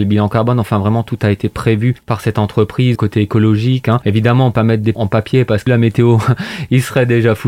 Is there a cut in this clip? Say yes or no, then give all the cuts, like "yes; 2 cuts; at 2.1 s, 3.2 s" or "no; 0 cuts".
yes; 4 cuts; at 3.0 s, 4.5 s, 4.9 s, 5.7 s